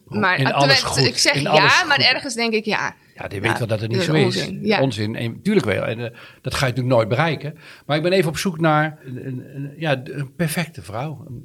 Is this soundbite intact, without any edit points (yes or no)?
yes